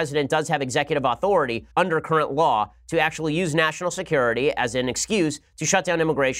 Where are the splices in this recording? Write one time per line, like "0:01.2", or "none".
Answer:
0:01.7